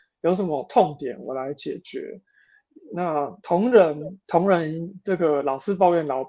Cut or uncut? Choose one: cut